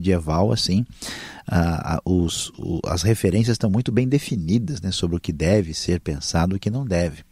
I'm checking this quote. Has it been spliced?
no; 0 cuts

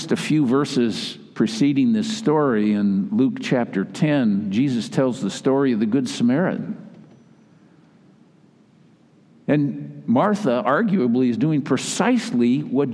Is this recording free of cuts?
yes; 0 cuts

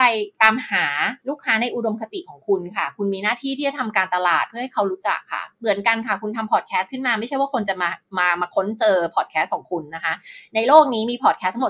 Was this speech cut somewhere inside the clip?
no; 0 cuts

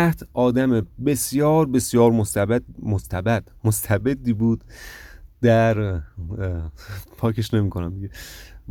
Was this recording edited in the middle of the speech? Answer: no; 0 cuts

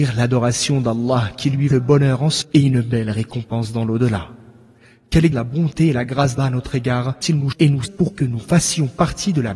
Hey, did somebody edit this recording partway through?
yes; 7 cuts; at 1.7 s, 2.4 s, 5.3 s, 6.4 s, 7.2 s, 7.5 s, 7.9 s

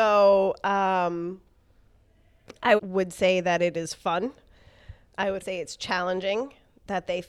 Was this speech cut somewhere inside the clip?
yes; 2 cuts; at 2.8 s, 5.4 s

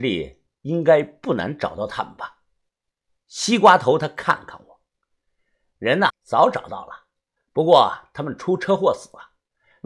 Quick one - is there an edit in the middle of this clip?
yes; 1 cut; at 6.1 s

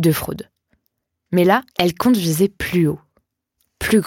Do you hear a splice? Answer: yes; 1 cut; at 1.7 s

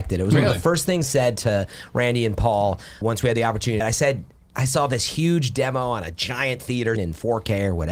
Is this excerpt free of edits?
no; 4 cuts; at 1.0 s, 3.0 s, 3.8 s, 7.0 s

